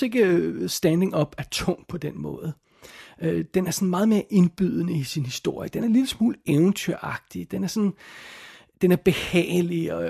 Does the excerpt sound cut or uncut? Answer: uncut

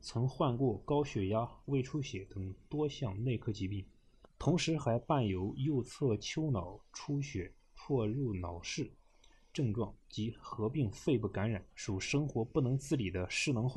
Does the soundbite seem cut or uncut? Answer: cut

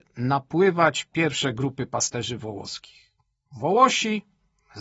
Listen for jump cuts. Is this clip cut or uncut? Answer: uncut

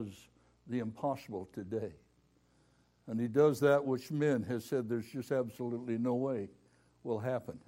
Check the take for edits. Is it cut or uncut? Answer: uncut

